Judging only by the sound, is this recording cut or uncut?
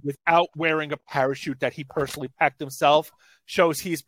uncut